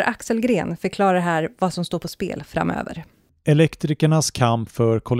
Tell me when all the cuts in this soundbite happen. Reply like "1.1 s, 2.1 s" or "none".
none